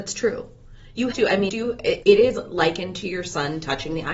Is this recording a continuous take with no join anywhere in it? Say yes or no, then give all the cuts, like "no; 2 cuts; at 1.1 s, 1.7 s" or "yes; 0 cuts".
no; 3 cuts; at 1.1 s, 1.5 s, 2.0 s